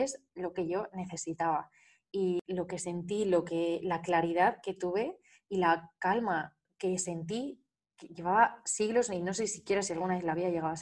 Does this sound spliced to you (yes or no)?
no